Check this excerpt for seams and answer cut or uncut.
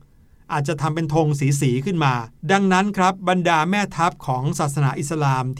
uncut